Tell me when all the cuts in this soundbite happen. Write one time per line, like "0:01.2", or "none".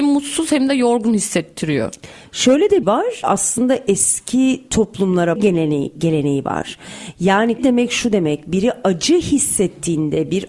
0:02.8
0:05.4
0:07.6